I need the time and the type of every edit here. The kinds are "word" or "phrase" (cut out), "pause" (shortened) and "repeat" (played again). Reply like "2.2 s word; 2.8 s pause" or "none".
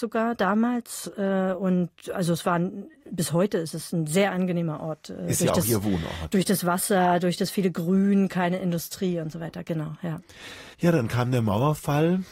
10.7 s pause